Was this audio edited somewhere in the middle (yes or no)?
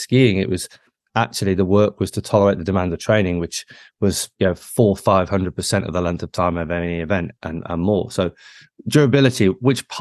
no